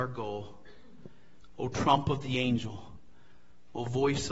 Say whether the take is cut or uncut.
uncut